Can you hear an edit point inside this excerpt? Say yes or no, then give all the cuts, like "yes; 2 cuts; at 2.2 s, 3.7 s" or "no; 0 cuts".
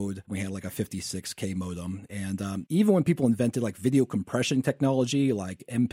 no; 0 cuts